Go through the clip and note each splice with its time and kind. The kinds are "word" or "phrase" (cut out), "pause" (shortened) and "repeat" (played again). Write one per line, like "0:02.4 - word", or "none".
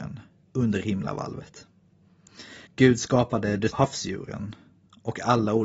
0:02.7 - pause
0:03.7 - word